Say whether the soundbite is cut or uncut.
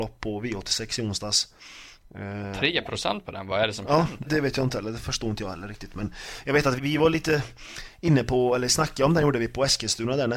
cut